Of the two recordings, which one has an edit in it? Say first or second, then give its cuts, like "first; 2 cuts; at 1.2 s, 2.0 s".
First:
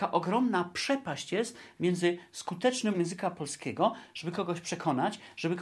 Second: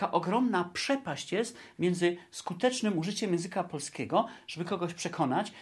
first; 1 cut; at 2.9 s